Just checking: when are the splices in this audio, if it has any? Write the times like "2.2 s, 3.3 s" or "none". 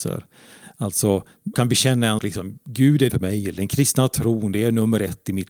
1.5 s, 2.2 s, 3.1 s